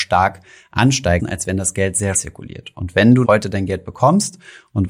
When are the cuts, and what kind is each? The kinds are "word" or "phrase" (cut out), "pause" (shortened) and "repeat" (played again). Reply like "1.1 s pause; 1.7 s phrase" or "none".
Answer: 1.2 s word; 2.1 s word; 3.2 s word